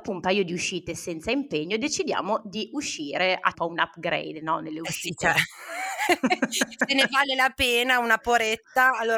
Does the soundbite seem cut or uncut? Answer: cut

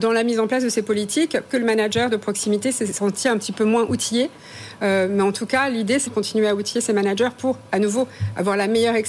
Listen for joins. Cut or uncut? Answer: cut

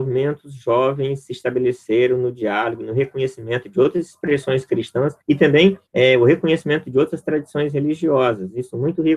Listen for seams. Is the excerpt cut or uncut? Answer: cut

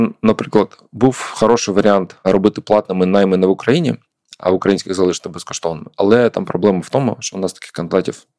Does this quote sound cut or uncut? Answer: uncut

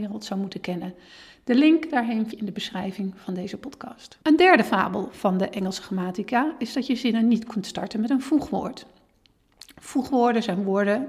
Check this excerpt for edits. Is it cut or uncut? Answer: cut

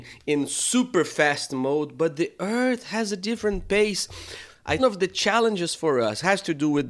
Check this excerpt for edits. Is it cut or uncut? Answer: cut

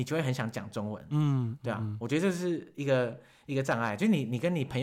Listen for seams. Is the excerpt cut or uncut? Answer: uncut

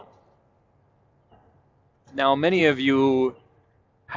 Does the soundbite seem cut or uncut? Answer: uncut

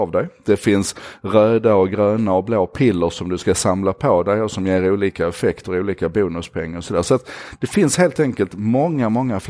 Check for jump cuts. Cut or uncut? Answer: uncut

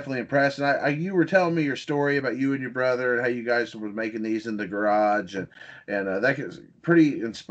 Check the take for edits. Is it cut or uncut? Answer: uncut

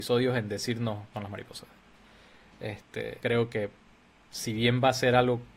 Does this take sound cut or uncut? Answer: cut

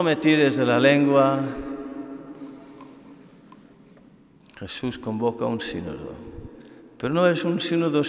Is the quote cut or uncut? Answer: uncut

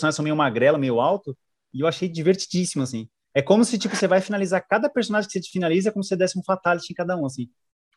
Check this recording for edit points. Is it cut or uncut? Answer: uncut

